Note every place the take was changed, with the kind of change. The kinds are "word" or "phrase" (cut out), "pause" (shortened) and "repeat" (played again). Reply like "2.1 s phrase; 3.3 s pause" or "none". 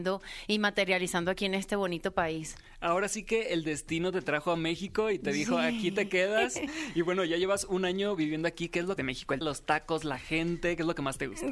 9.0 s phrase; 9.4 s word